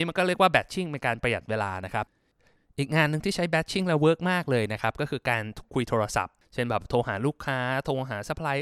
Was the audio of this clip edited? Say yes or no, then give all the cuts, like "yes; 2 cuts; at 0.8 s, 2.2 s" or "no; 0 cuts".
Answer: no; 0 cuts